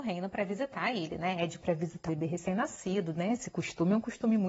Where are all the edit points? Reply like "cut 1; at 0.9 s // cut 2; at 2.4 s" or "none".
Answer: cut 1; at 1.6 s // cut 2; at 2.1 s